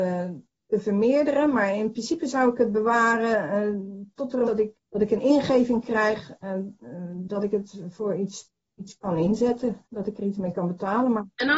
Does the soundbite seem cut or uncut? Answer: cut